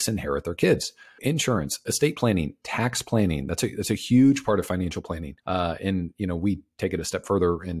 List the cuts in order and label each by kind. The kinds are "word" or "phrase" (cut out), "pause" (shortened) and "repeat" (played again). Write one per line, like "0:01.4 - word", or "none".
0:01.2 - word
0:05.4 - pause